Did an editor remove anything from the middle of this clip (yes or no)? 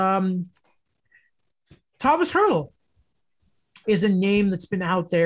yes